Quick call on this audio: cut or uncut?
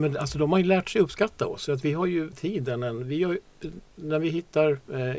cut